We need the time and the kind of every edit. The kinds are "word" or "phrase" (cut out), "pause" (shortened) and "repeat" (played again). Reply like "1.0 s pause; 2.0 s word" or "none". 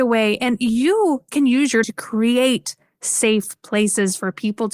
1.8 s word